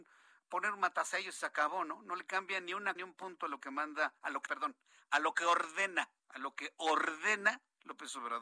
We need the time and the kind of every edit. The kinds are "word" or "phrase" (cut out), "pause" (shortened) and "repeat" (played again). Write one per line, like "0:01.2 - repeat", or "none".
0:03.0 - word
0:04.5 - word
0:06.2 - pause